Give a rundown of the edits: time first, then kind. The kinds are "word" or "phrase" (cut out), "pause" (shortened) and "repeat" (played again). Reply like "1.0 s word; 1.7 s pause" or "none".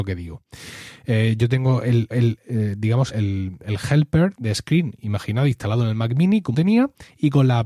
2.1 s repeat; 3.1 s word; 6.5 s word